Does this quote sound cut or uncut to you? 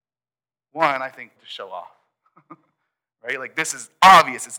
cut